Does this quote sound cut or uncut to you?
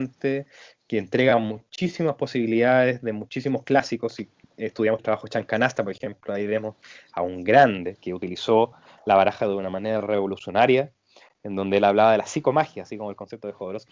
cut